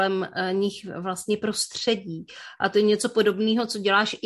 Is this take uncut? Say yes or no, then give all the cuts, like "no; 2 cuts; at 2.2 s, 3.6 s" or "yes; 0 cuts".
yes; 0 cuts